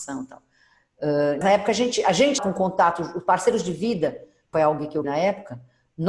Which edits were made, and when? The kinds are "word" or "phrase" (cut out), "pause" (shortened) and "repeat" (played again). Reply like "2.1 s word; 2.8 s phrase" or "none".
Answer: 1.4 s word; 2.4 s word; 4.5 s word; 5.0 s word